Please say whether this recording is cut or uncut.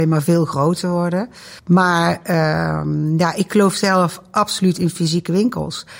cut